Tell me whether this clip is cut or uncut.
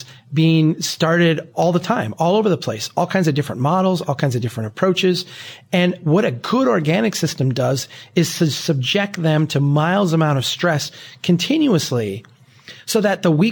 uncut